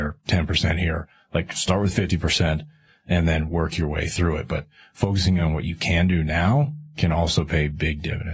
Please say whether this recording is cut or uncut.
uncut